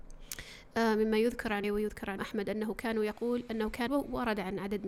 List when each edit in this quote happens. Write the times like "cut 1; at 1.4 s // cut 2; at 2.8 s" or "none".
cut 1; at 1.6 s // cut 2; at 2.2 s // cut 3; at 3.9 s